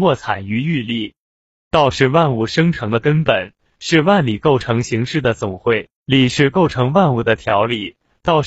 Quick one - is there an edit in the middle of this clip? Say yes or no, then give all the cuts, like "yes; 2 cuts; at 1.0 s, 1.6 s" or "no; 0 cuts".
yes; 1 cut; at 6.0 s